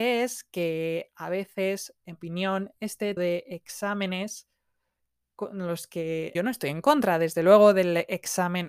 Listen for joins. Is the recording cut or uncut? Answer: cut